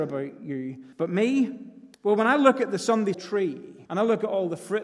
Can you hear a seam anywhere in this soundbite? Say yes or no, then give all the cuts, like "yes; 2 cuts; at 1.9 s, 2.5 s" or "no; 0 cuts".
yes; 4 cuts; at 0.9 s, 1.9 s, 3.1 s, 3.9 s